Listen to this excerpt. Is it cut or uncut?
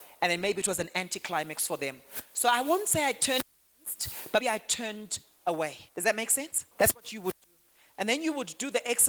cut